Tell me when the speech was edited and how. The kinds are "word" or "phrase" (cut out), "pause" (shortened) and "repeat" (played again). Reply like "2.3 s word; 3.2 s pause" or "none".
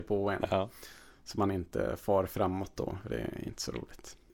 none